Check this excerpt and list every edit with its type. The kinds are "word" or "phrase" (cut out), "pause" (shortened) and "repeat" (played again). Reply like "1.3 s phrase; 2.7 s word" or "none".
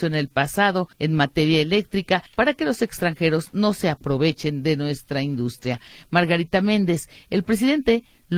0.9 s pause; 2.3 s pause